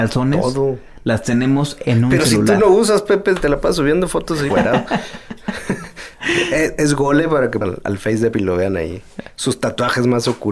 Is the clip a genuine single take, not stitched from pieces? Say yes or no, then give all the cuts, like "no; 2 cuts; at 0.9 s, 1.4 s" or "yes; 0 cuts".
no; 3 cuts; at 4.5 s, 7.6 s, 8.3 s